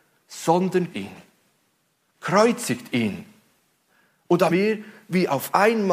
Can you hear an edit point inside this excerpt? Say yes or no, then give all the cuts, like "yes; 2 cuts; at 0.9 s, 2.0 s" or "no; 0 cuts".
yes; 2 cuts; at 0.9 s, 4.5 s